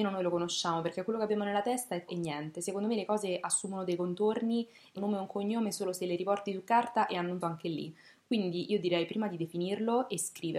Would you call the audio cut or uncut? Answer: cut